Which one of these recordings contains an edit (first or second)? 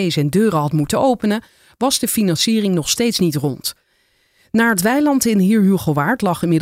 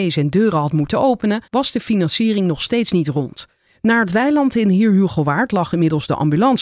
second